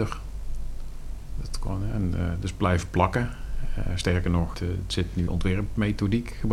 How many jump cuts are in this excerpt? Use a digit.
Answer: 2